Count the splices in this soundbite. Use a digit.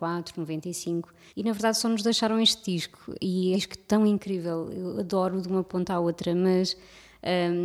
2